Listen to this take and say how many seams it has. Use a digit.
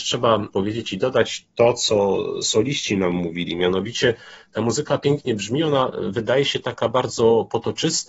0